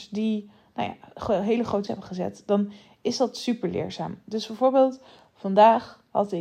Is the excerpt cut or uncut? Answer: cut